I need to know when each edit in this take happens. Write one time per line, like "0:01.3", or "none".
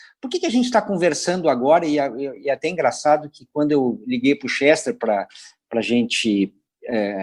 none